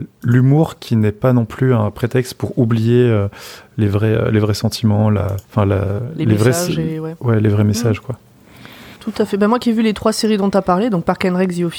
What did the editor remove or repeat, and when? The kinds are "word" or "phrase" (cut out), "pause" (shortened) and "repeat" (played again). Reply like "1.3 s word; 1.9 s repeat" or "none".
5.4 s pause; 9.0 s pause